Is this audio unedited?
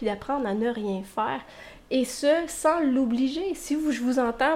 yes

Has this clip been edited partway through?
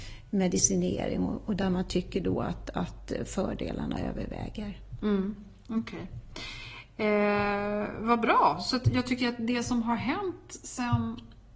no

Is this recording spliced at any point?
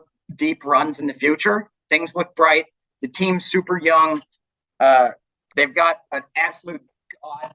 no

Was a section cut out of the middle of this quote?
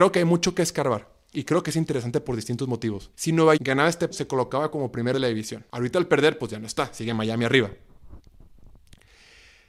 yes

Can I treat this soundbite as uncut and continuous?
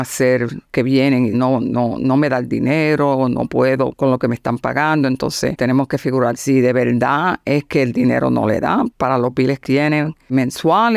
no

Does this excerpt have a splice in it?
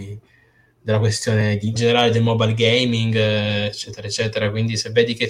yes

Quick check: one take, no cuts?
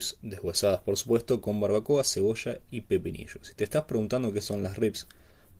yes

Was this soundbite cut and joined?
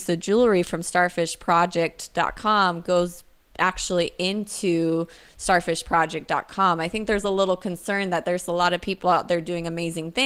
no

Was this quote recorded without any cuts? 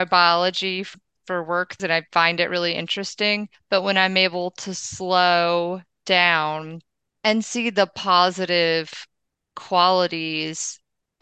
yes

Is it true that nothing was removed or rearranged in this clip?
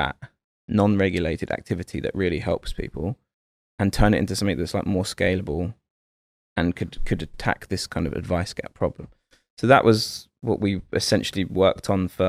yes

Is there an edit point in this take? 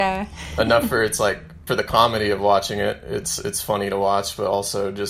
yes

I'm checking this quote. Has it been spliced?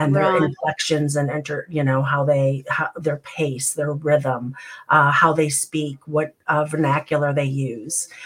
no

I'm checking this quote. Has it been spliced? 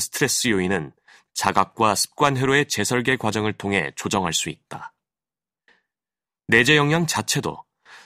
no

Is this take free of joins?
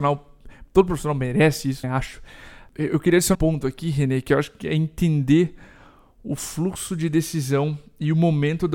no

